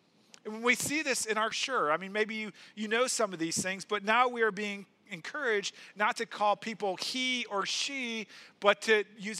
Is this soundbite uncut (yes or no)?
no